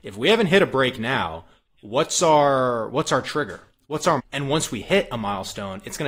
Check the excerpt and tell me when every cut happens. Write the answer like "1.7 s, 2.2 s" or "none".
4.2 s